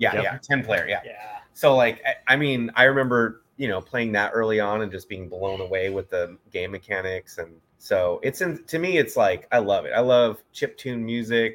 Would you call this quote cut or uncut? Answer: cut